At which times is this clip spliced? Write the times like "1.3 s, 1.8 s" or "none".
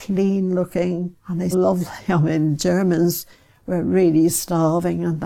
1.2 s, 1.5 s